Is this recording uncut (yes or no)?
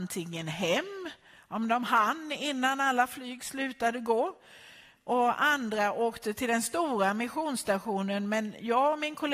yes